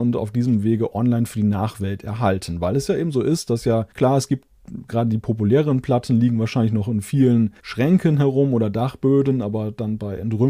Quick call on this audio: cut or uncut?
cut